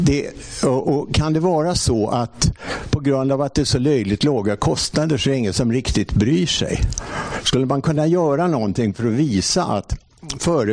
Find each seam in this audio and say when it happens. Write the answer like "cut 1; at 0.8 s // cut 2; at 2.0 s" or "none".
none